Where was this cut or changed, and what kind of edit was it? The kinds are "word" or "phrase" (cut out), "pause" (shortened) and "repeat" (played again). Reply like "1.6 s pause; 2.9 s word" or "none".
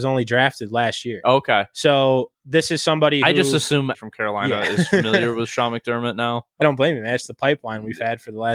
2.3 s pause; 3.9 s word; 6.6 s word

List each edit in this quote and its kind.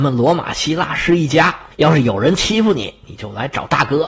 1.7 s pause

